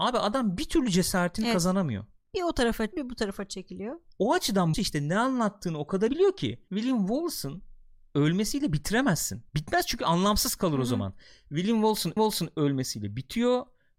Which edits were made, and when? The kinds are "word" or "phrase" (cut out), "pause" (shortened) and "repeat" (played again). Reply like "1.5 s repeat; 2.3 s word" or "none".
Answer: 2.9 s word; 4.7 s word; 6.1 s word; 6.7 s word; 9.5 s pause; 12.2 s repeat

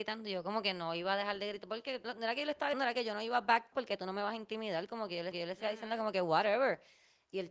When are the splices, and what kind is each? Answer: 2.0 s word; 2.7 s word; 3.7 s word; 5.3 s repeat

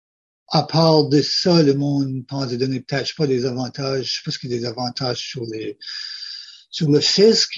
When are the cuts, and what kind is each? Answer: none

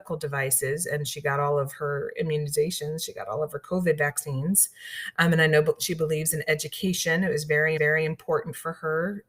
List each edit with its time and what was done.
7.8 s repeat

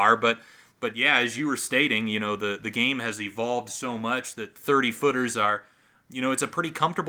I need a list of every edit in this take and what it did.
none

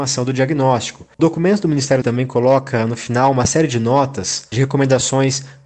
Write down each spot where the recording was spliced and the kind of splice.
1.2 s word; 2.0 s phrase

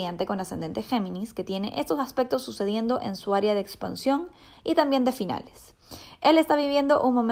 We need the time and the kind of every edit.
none

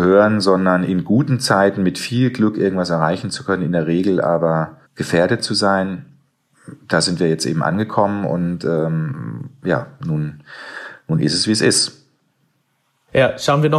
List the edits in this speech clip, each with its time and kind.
4.8 s pause

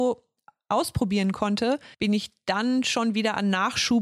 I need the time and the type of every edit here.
1.9 s pause

